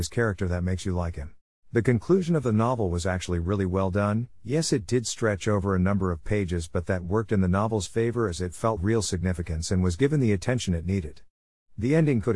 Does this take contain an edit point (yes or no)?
yes